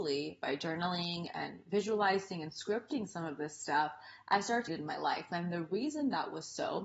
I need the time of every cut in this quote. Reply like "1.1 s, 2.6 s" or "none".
4.7 s